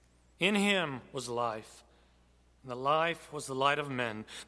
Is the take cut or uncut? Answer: uncut